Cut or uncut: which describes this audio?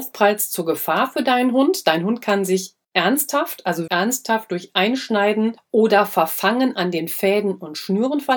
cut